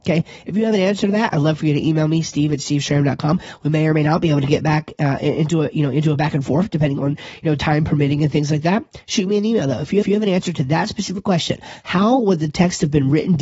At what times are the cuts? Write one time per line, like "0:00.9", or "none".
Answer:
0:10.0

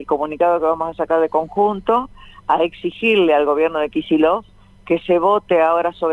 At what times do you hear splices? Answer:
none

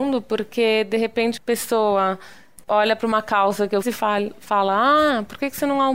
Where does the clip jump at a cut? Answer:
0:01.4
0:02.6
0:03.8

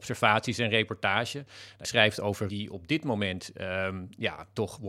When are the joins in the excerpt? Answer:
0:01.8
0:02.5

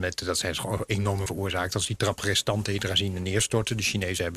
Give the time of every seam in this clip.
0:01.3
0:02.2

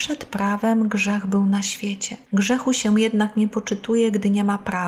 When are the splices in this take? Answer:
0:02.2

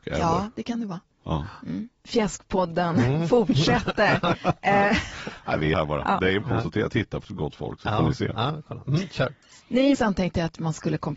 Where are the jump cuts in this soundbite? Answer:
0:05.7
0:06.4
0:07.2
0:09.9

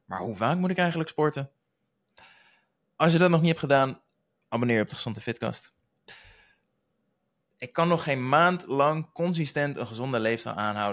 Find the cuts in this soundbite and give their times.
none

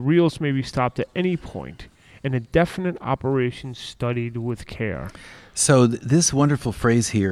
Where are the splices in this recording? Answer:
none

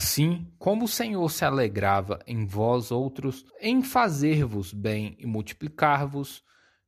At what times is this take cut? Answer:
0:03.5

